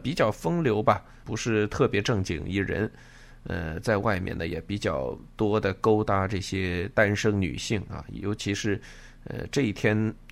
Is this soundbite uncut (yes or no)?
no